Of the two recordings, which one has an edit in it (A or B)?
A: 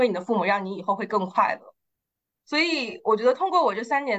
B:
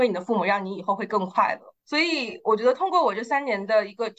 B